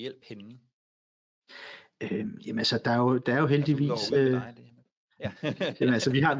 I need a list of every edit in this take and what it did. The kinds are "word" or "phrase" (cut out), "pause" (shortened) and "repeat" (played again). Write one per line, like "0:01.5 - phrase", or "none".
none